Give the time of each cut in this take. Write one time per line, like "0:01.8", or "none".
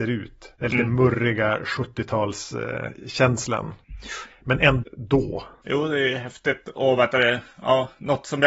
0:04.8